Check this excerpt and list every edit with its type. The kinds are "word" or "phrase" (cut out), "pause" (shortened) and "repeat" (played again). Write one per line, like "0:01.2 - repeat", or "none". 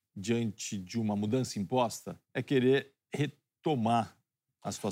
0:02.2 - pause